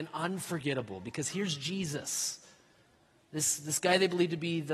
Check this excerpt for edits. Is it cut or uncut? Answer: uncut